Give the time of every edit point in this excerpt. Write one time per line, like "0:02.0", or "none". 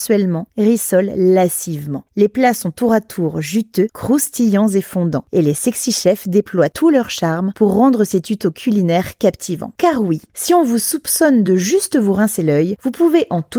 none